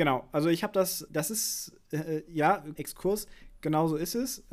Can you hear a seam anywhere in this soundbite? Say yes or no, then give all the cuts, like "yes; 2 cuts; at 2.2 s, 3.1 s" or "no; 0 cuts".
yes; 2 cuts; at 1.1 s, 2.8 s